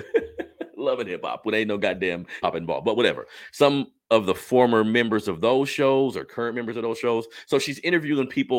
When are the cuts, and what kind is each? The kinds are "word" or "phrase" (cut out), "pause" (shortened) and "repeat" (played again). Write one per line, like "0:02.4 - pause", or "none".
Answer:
0:02.4 - word

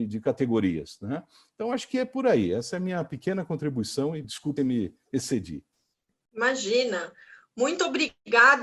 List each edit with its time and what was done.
0:04.2 - word
0:04.6 - word

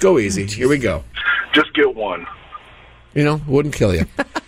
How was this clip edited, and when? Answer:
none

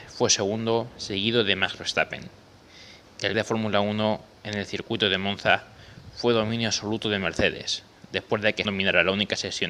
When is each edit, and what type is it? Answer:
0:03.3 - word
0:08.7 - word

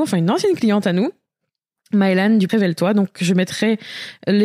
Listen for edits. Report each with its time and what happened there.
0:02.5 - word

